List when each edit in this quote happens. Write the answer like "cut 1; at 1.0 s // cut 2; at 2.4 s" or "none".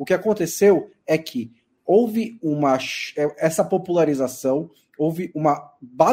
none